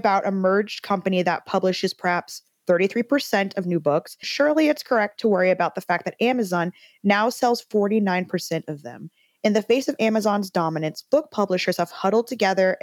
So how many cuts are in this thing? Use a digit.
1